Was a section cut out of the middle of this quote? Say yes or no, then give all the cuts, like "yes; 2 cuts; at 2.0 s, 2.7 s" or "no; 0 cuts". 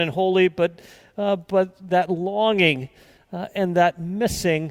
no; 0 cuts